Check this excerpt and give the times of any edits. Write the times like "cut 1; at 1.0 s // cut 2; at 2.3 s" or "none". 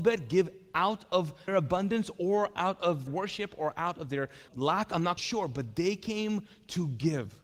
cut 1; at 1.5 s // cut 2; at 3.1 s // cut 3; at 4.5 s // cut 4; at 5.2 s